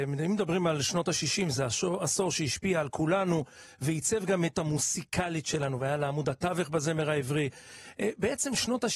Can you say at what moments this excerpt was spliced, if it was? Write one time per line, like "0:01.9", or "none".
0:04.5